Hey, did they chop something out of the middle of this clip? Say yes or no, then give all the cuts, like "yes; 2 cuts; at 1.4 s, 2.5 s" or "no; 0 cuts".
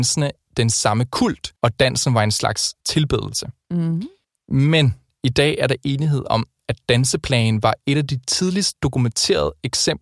yes; 3 cuts; at 1.6 s, 2.8 s, 4.2 s